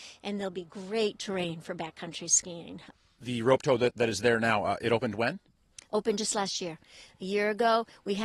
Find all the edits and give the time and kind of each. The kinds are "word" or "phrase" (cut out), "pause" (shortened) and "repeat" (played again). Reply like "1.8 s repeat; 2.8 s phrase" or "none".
none

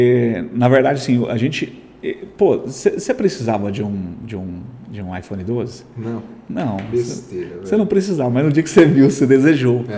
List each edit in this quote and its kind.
none

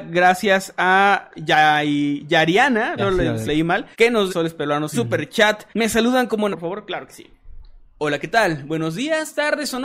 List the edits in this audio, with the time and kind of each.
1.3 s word; 3.0 s phrase; 3.5 s word; 3.9 s pause; 4.3 s phrase; 4.9 s phrase; 5.7 s pause; 6.5 s phrase

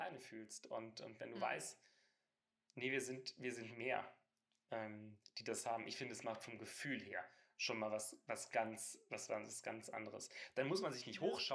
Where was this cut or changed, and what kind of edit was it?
none

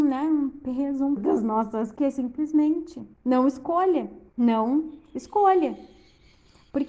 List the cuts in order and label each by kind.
1.2 s word; 1.9 s word; 3.1 s pause; 4.3 s pause

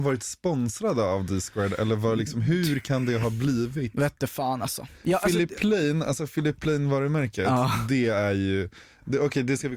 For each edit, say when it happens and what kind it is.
none

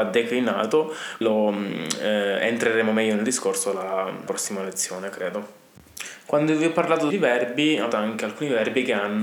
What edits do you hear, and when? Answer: 1.2 s word; 4.3 s word; 7.1 s phrase; 7.9 s word

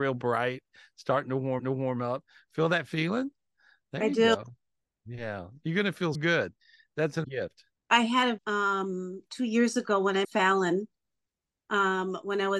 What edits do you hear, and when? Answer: 1.6 s repeat; 6.1 s word; 7.2 s word; 7.7 s pause; 8.4 s word; 10.2 s word

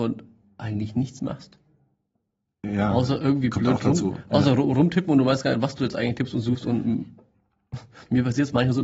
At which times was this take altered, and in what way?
none

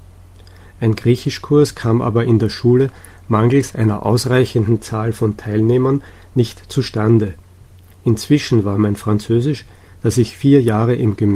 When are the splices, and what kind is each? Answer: none

